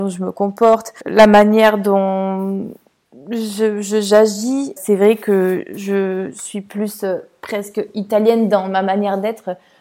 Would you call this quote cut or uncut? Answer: cut